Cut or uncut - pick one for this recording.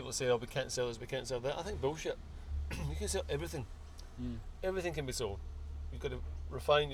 cut